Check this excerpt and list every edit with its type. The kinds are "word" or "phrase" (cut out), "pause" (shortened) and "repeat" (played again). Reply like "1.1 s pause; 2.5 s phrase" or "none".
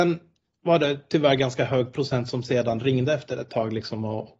none